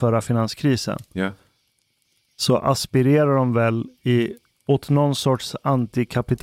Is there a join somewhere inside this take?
no; 0 cuts

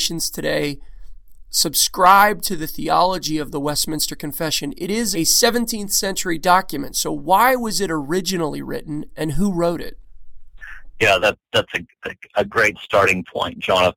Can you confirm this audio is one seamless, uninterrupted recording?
no; 2 cuts; at 5.1 s, 11.2 s

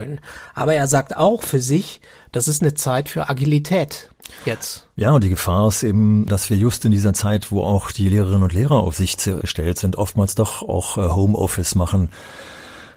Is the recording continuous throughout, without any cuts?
yes; 0 cuts

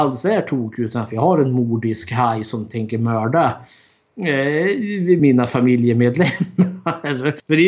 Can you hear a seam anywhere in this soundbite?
no; 0 cuts

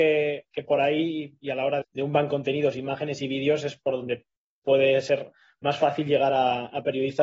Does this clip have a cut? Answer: yes; 2 cuts; at 1.8 s, 2.3 s

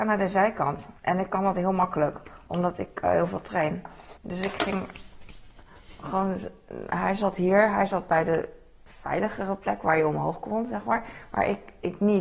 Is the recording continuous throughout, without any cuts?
no; 2 cuts; at 1.0 s, 4.2 s

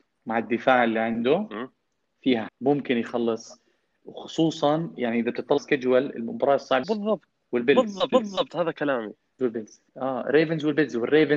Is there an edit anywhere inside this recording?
yes; 7 cuts; at 2.5 s, 4.0 s, 5.6 s, 6.8 s, 8.1 s, 9.4 s, 9.9 s

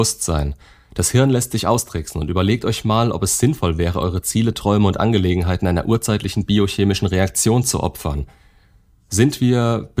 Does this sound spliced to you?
no; 0 cuts

